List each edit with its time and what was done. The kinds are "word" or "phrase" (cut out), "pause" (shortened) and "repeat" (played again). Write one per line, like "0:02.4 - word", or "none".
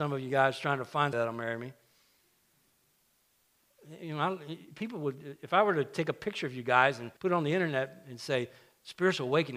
0:01.1 - word
0:07.2 - pause

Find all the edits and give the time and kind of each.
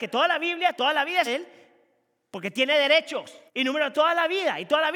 0:01.3 - word
0:03.5 - pause
0:03.9 - word

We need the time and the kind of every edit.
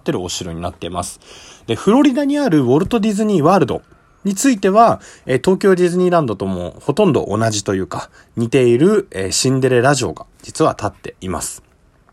none

